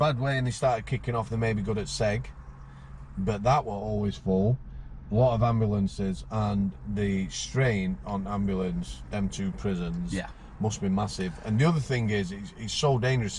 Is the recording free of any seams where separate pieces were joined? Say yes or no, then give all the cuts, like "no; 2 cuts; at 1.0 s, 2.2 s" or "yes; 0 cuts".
yes; 0 cuts